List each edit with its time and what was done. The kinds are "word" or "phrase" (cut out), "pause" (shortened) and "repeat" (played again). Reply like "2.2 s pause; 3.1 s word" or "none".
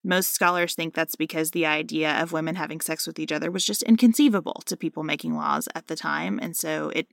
none